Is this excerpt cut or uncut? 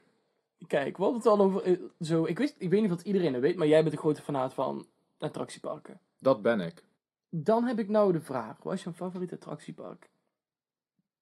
cut